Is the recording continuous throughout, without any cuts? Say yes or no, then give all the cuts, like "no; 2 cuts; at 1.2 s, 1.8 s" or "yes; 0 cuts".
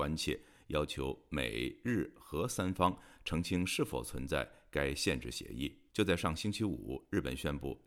no; 1 cut; at 5.9 s